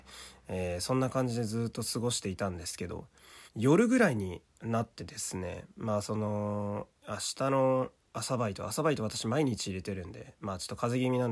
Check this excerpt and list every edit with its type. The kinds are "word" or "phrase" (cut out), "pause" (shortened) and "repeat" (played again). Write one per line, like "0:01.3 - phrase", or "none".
0:03.5 - pause
0:04.5 - pause
0:07.0 - pause